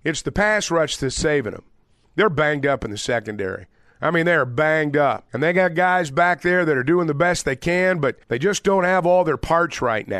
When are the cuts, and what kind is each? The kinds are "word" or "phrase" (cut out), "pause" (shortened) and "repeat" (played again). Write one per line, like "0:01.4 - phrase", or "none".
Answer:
0:05.3 - pause
0:08.2 - pause